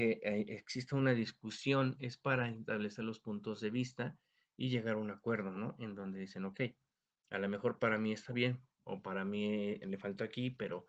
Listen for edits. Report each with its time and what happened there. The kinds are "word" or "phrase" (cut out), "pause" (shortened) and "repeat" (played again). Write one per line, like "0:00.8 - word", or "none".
0:08.7 - pause